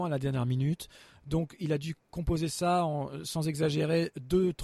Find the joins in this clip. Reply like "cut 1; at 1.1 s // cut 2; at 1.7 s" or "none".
none